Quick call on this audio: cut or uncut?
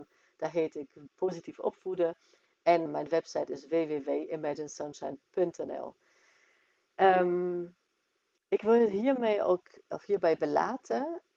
cut